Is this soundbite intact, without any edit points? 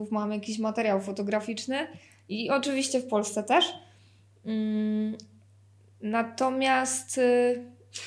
yes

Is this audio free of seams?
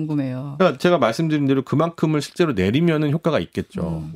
yes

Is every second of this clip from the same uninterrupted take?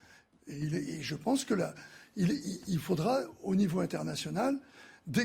yes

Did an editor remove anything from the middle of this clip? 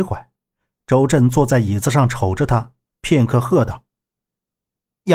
no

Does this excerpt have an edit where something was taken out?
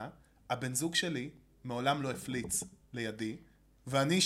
no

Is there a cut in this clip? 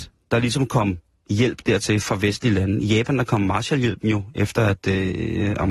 no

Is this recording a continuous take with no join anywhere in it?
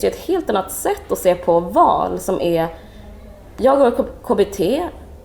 yes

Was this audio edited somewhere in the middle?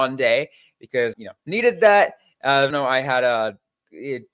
yes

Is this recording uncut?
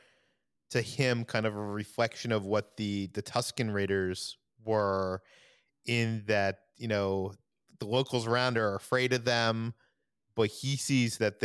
yes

